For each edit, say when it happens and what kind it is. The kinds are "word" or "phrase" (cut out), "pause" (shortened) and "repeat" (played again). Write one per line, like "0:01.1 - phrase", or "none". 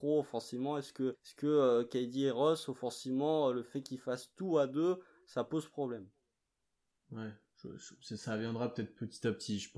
0:01.1 - word